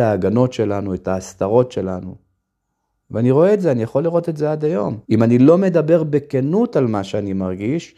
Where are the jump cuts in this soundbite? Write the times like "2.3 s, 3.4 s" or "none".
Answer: 5.0 s